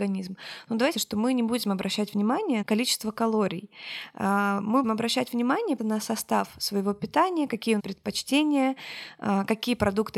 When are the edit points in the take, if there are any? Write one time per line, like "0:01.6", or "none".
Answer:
0:00.9
0:02.6
0:04.8
0:05.8
0:07.8